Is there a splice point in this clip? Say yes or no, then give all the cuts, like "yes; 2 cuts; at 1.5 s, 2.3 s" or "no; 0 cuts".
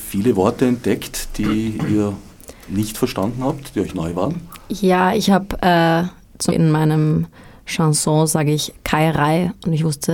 yes; 1 cut; at 6.5 s